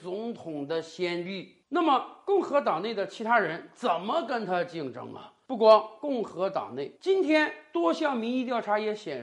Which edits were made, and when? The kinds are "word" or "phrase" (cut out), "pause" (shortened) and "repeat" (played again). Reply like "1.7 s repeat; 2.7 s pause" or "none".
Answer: 1.6 s pause; 7.0 s pause